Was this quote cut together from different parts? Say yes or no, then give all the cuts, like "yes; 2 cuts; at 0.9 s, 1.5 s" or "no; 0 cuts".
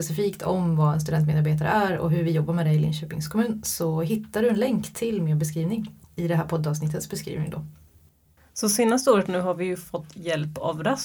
no; 0 cuts